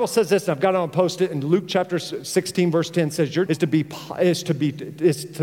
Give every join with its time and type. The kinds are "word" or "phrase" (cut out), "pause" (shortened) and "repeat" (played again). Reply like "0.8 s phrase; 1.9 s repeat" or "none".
3.5 s word